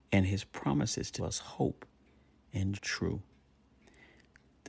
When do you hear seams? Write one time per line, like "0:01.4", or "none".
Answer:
0:01.2
0:02.8